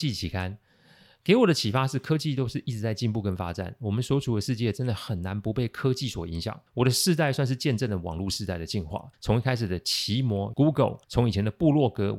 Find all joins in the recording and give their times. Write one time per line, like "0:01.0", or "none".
0:06.7
0:09.1
0:10.5
0:11.0